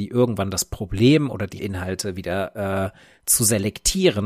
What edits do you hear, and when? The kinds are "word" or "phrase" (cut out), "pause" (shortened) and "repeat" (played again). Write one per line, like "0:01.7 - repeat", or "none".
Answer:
0:01.6 - phrase

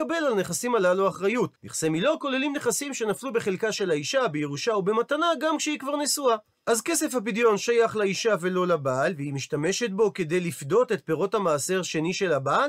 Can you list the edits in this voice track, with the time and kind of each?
0:01.6 - pause
0:06.4 - pause

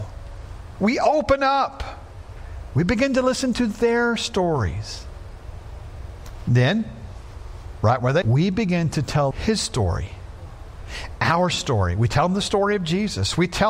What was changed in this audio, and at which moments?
0:08.2 - word
0:09.3 - word
0:11.2 - word

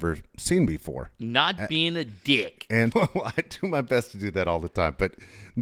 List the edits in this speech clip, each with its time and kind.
0:02.9 - word

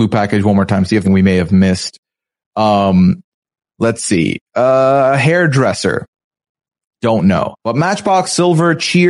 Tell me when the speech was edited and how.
0:01.0 - phrase
0:07.6 - pause

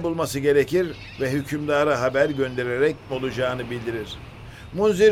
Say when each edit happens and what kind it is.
0:03.1 - word

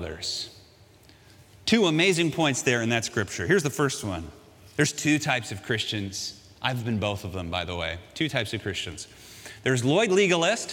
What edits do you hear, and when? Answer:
none

